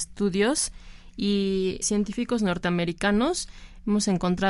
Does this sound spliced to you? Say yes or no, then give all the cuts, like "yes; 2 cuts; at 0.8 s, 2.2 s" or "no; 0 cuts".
yes; 1 cut; at 1.8 s